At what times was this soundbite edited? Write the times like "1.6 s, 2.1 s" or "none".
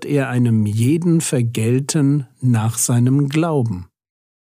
none

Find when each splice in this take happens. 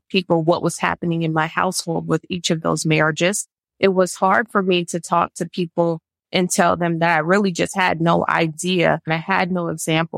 none

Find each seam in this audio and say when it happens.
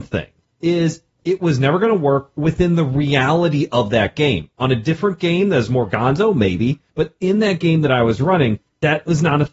6.9 s

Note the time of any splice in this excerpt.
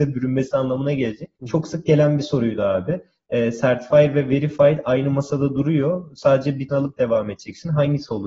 1.4 s, 6.7 s

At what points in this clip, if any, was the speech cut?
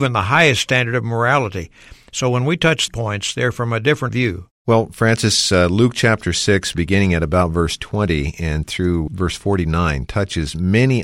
2.9 s, 4.1 s, 4.5 s

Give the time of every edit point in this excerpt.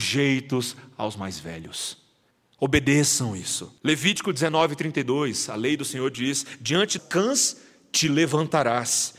2.3 s, 3.8 s, 7.0 s

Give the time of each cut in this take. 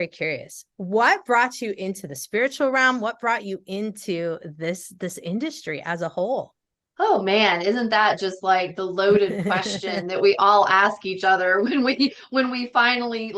6.6 s

